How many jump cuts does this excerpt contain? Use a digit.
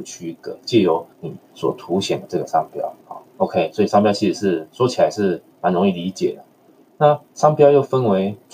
4